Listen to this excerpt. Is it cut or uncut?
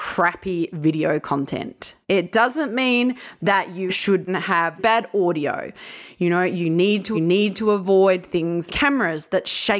cut